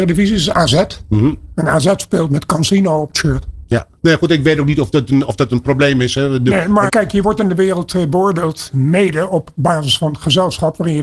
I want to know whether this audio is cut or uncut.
cut